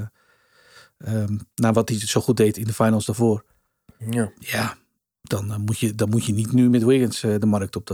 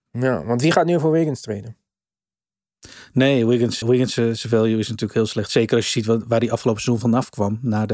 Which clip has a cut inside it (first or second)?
second